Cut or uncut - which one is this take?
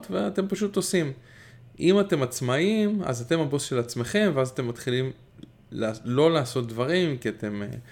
uncut